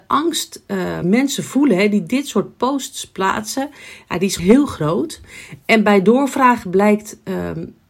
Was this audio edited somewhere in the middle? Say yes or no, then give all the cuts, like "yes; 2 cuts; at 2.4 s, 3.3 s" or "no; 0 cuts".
yes; 2 cuts; at 1.0 s, 4.4 s